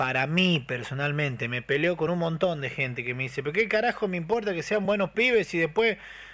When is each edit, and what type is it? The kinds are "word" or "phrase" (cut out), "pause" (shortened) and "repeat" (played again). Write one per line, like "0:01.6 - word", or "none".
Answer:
none